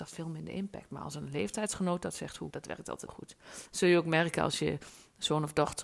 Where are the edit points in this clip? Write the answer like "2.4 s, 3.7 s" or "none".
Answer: 2.5 s, 3.1 s